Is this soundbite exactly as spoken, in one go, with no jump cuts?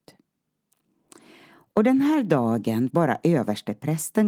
no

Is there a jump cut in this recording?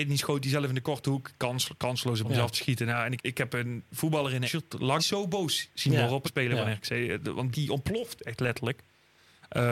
yes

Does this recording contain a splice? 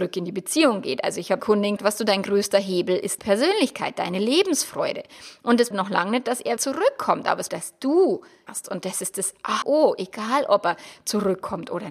yes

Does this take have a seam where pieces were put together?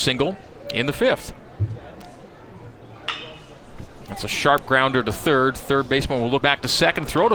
yes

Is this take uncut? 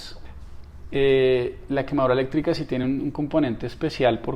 yes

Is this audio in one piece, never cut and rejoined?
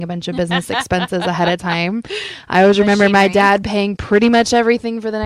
yes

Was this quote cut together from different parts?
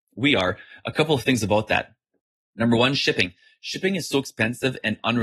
no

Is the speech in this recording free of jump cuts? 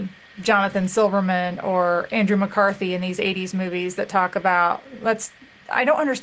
yes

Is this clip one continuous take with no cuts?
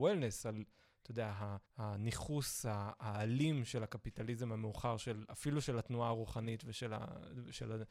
no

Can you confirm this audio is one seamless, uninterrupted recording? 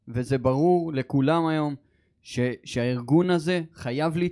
yes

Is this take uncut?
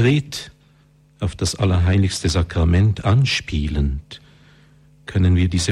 yes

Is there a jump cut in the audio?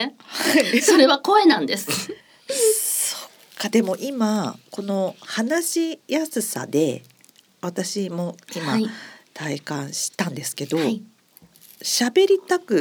yes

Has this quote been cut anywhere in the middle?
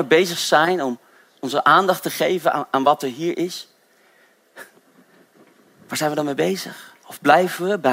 no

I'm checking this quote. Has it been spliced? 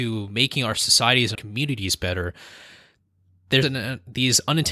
yes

